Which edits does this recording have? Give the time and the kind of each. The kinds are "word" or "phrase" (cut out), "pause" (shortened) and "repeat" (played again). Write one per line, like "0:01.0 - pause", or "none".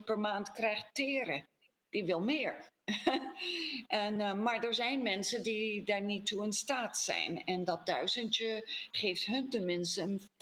none